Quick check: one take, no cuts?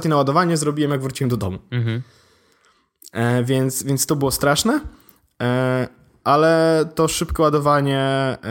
yes; 0 cuts

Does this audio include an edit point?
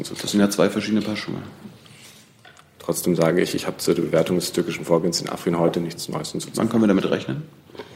no; 0 cuts

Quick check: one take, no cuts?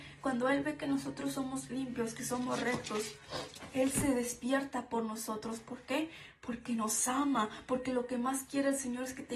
yes; 0 cuts

